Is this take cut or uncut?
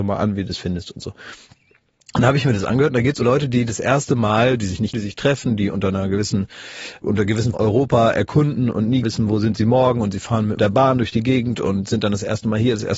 cut